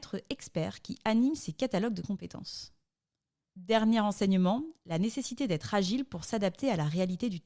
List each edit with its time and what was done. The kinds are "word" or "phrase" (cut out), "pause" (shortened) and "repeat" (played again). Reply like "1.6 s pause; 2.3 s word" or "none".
none